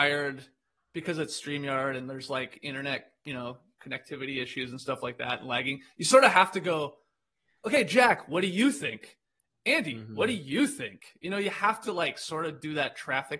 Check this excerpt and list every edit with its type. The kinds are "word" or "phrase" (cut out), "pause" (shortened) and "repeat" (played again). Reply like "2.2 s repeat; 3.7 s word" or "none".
none